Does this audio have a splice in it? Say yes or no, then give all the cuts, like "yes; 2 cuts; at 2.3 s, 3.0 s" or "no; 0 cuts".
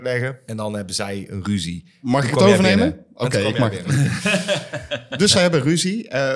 no; 0 cuts